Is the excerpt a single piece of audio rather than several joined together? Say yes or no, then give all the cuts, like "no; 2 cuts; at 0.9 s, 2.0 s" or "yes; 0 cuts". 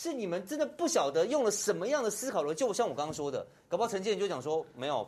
yes; 0 cuts